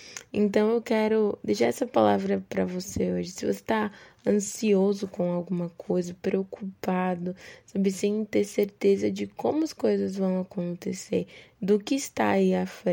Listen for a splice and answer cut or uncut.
uncut